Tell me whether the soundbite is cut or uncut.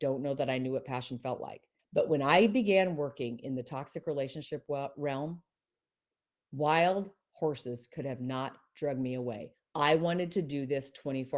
cut